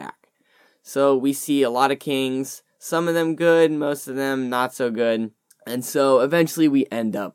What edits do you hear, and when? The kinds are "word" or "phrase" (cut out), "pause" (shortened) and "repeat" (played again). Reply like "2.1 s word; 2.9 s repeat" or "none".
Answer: 5.5 s pause

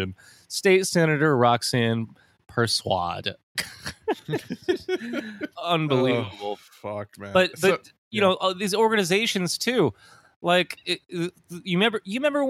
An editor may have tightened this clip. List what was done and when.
5.5 s word

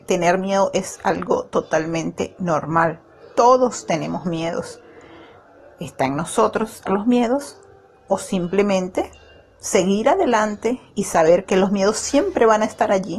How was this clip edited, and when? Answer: 6.9 s word

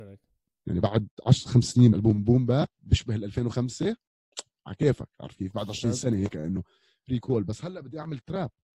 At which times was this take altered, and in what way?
1.9 s word

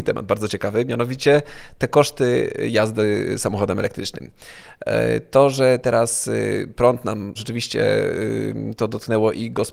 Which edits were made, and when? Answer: 7.4 s phrase

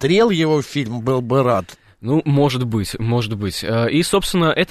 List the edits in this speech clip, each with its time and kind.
none

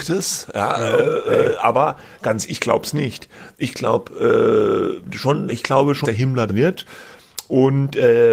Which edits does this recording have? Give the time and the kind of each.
2.5 s word; 5.5 s word; 6.0 s word; 6.5 s word

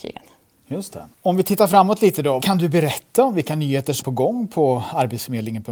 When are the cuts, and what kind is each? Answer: 1.1 s pause; 2.4 s word; 4.0 s word

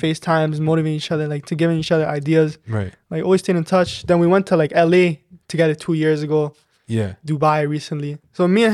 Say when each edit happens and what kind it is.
none

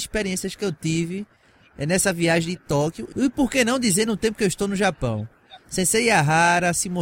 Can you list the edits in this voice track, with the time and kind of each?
none

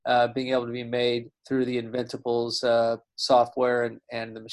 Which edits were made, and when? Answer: 1.4 s pause

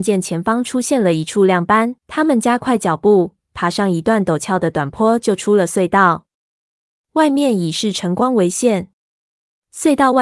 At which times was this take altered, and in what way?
2.0 s pause

